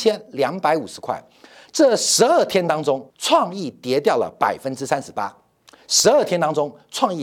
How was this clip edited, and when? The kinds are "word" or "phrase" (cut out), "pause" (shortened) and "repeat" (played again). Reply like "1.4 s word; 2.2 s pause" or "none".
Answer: 3.1 s pause